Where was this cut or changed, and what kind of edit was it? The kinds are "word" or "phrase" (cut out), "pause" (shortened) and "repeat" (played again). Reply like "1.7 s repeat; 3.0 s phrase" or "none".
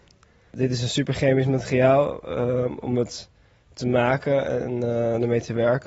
none